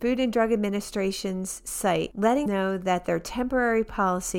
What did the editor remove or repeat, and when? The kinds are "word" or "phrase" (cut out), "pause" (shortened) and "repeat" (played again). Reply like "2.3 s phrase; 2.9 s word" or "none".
2.5 s word

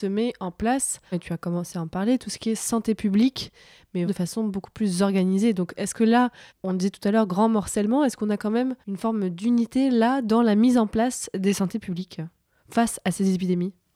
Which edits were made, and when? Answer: 1.1 s word; 4.1 s word; 6.5 s pause; 8.8 s pause

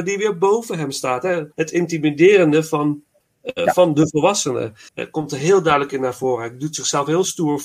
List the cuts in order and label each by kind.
1.5 s pause; 3.2 s pause; 4.9 s pause

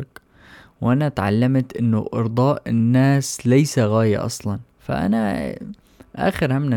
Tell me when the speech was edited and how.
4.7 s pause

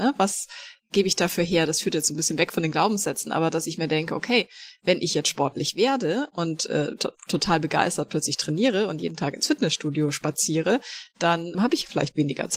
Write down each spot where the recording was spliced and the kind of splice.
11.5 s word

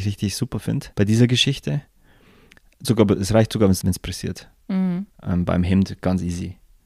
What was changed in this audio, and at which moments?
0.9 s pause; 2.8 s word; 3.8 s word; 5.1 s pause

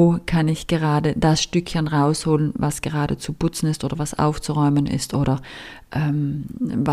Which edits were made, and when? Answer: none

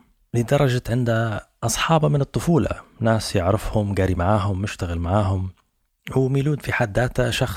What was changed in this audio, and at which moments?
none

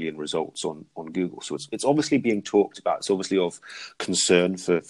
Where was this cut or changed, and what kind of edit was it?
none

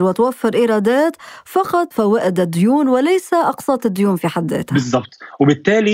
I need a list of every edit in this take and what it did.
1.9 s word

